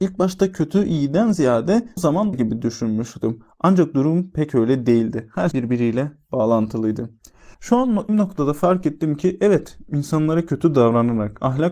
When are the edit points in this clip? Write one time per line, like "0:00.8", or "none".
0:02.0
0:02.3
0:05.5
0:07.5
0:08.1